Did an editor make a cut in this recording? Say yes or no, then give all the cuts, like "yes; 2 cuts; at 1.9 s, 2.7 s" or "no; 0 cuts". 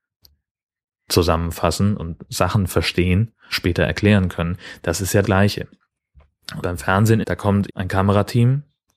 yes; 6 cuts; at 2.0 s, 3.5 s, 5.2 s, 6.6 s, 7.2 s, 7.7 s